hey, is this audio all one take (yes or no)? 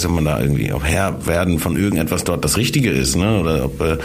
yes